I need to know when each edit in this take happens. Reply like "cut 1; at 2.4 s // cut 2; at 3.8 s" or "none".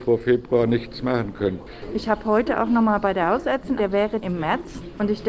cut 1; at 3.8 s // cut 2; at 4.2 s